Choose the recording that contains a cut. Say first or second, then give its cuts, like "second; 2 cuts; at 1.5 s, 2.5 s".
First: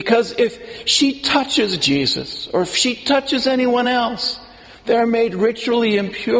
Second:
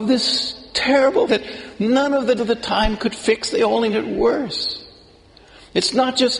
second; 3 cuts; at 1.3 s, 2.4 s, 3.9 s